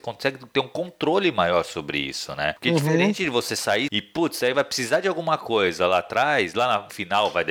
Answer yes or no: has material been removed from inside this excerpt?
yes